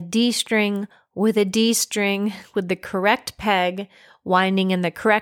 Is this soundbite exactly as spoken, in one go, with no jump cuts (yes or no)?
yes